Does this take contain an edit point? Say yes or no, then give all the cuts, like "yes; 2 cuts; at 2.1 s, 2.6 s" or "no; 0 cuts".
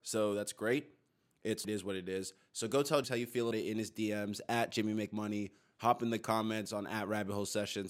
yes; 3 cuts; at 1.6 s, 3.0 s, 3.5 s